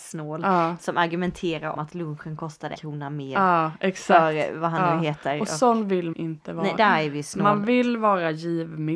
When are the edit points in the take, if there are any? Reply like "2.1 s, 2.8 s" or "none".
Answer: 1.8 s, 2.8 s, 6.1 s, 6.8 s